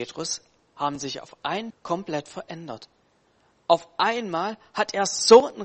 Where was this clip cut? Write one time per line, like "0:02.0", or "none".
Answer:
0:01.7